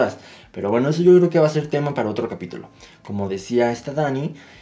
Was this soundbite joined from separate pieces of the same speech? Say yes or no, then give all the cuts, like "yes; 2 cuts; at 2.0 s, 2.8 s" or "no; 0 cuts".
no; 0 cuts